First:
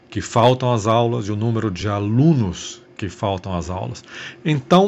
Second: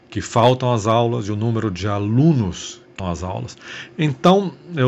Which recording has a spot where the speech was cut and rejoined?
second; 1 cut; at 3.0 s

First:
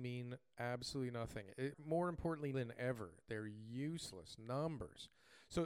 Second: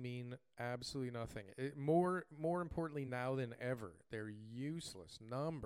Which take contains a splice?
first; 2 cuts; at 1.7 s, 2.5 s

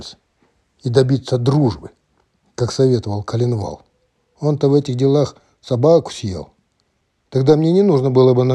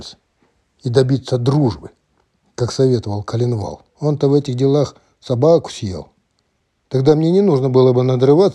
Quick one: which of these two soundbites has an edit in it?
second; 1 cut; at 3.9 s

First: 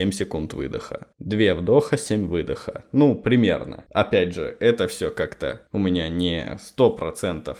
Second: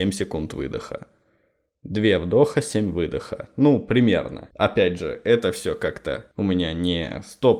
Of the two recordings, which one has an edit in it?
first; 1 cut; at 1.1 s

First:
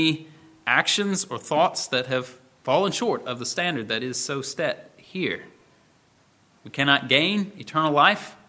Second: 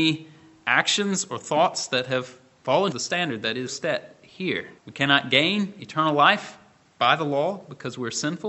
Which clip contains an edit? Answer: second; 3 cuts; at 2.9 s, 3.7 s, 4.8 s

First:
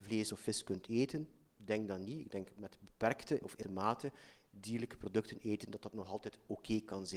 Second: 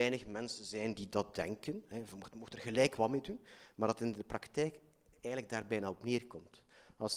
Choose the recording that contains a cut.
first; 1 cut; at 3.6 s

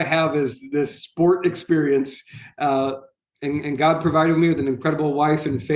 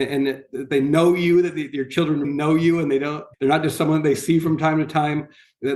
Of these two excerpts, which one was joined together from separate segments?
second; 2 cuts; at 2.2 s, 3.3 s

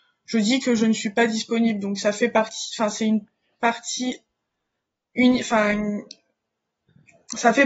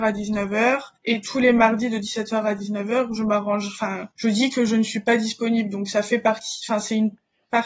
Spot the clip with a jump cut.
second; 2 cuts; at 1.0 s, 4.1 s

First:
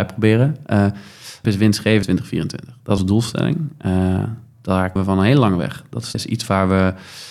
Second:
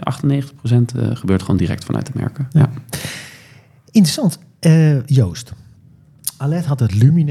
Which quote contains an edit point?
first; 5 cuts; at 1.4 s, 2.0 s, 3.0 s, 5.0 s, 6.1 s

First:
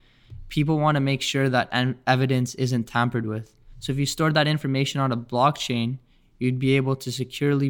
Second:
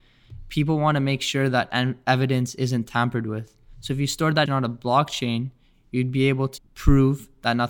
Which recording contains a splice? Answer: second; 2 cuts; at 4.5 s, 6.6 s

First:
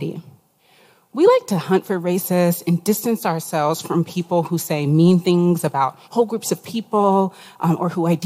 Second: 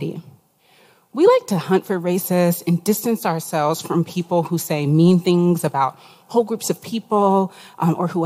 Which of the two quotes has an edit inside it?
first; 1 cut; at 6.0 s

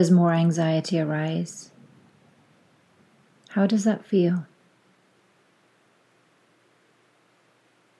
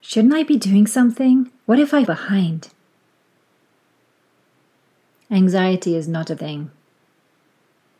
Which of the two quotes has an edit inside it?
second; 3 cuts; at 1.6 s, 2.0 s, 6.4 s

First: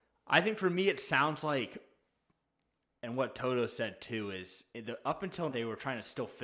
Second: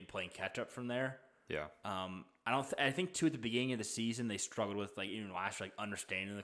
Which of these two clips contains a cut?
first; 2 cuts; at 4.7 s, 5.5 s

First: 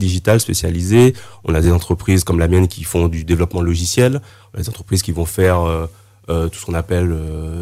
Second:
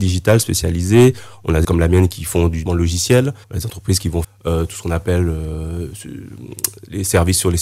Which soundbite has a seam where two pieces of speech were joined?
second; 4 cuts; at 1.6 s, 2.7 s, 3.4 s, 4.2 s

